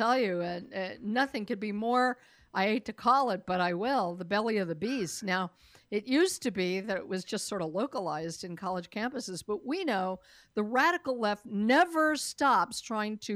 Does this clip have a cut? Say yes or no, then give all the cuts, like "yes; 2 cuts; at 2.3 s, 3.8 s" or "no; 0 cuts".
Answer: no; 0 cuts